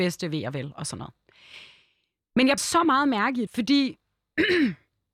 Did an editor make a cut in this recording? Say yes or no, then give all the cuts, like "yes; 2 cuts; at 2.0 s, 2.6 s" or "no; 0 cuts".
yes; 2 cuts; at 2.6 s, 3.5 s